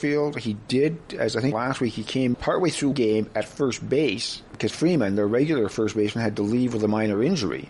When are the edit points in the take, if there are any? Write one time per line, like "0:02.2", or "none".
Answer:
0:01.5
0:02.3
0:02.9
0:04.7